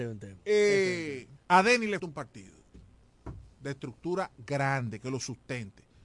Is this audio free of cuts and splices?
no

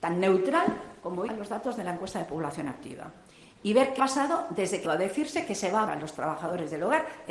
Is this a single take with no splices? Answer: no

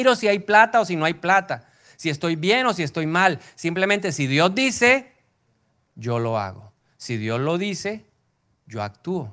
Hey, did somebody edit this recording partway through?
no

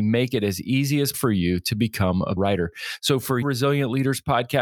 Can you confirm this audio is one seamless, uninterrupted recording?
no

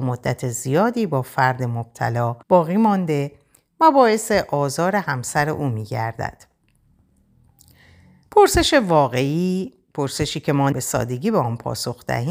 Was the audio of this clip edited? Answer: yes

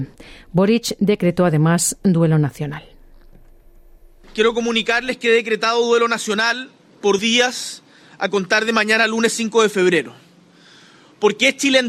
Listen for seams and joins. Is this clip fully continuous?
no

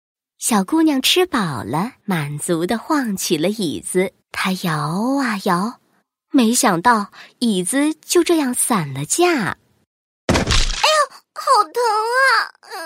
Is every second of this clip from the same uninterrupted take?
no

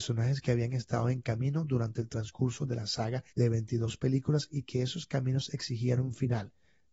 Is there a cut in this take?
yes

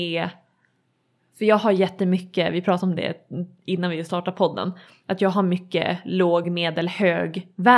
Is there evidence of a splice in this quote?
no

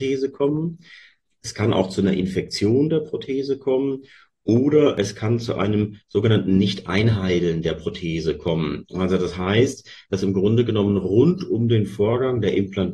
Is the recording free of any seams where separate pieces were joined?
yes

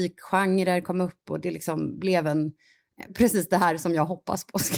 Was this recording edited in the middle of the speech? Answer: yes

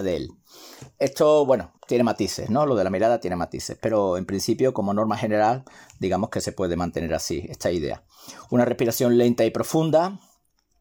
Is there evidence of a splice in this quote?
yes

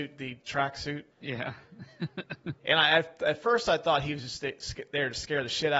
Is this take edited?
yes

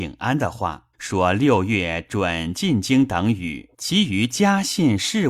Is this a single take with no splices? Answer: no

